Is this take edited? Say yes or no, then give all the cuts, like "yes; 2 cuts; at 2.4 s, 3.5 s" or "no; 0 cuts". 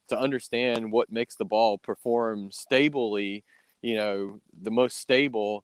no; 0 cuts